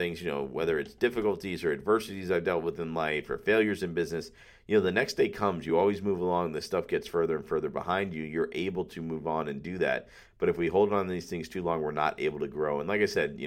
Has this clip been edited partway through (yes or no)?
no